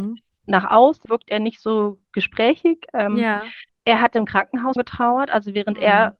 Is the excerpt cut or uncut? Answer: cut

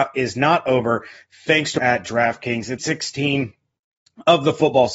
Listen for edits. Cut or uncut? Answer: cut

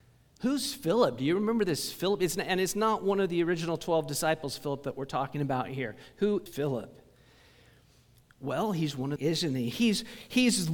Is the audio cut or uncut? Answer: cut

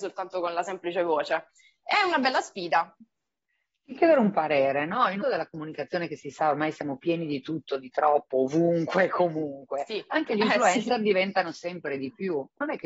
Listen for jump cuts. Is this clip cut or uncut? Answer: cut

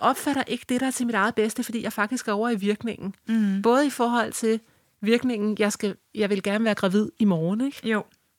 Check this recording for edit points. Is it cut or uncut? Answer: uncut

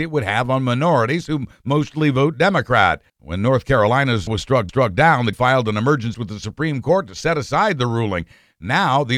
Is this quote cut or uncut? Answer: cut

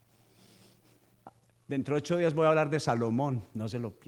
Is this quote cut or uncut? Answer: uncut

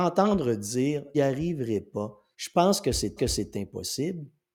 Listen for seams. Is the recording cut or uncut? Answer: cut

